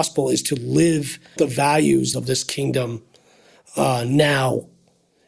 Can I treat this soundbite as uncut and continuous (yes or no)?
no